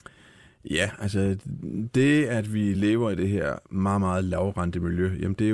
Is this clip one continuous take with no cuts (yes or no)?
yes